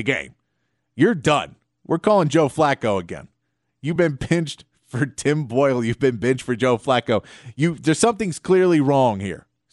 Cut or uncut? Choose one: uncut